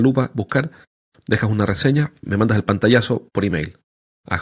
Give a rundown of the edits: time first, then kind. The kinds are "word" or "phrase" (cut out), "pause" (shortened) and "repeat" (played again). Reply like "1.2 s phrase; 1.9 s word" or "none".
none